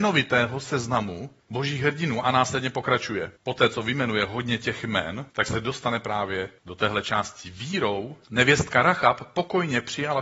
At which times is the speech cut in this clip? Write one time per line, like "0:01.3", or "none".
0:01.4
0:03.4
0:05.3
0:06.6
0:08.2